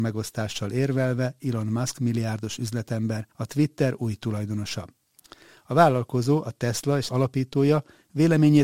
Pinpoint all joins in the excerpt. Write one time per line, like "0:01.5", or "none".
0:03.3
0:07.1